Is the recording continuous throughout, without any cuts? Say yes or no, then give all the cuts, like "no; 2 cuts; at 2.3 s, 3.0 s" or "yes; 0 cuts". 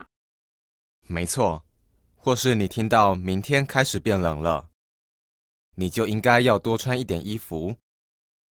yes; 0 cuts